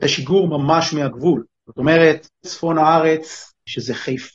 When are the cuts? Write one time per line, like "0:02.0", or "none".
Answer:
0:02.4